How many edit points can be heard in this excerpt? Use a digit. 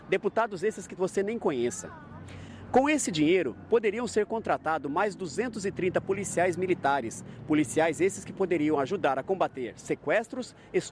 1